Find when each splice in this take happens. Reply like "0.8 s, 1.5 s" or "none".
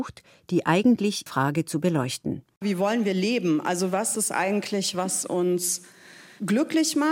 1.3 s, 4.2 s